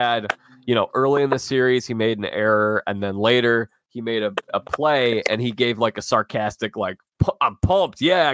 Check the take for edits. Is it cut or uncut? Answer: uncut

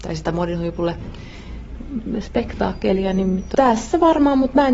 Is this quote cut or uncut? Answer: uncut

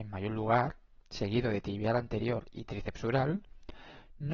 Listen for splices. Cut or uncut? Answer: uncut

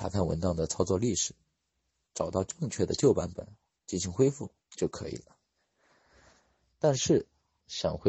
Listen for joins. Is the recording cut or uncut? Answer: uncut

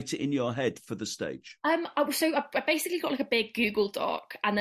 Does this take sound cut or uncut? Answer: cut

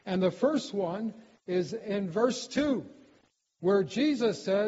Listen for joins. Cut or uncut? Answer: uncut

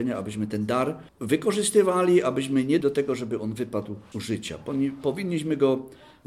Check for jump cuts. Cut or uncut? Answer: cut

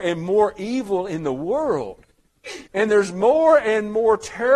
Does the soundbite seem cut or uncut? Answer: cut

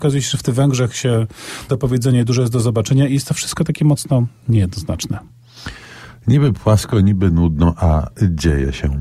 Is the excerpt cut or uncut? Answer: cut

